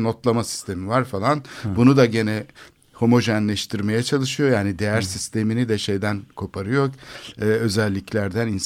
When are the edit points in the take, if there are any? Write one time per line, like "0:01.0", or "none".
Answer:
none